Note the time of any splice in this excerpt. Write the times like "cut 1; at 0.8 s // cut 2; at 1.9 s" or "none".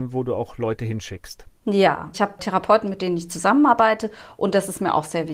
cut 1; at 2.1 s